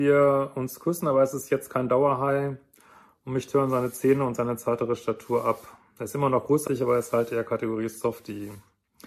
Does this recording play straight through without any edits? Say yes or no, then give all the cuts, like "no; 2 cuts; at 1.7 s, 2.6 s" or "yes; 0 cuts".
no; 1 cut; at 6.7 s